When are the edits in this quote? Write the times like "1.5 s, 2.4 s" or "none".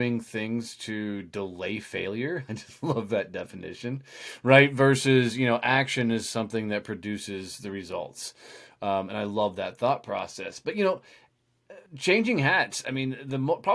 11.9 s